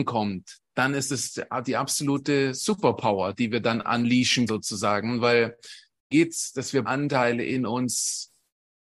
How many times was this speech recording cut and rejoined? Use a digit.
3